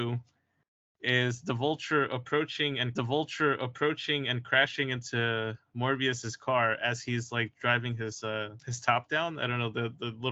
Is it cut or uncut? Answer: cut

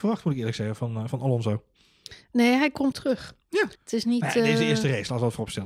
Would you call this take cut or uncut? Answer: cut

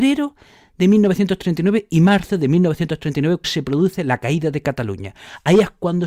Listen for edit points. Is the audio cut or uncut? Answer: cut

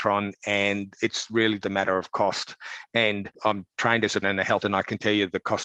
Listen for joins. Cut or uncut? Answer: cut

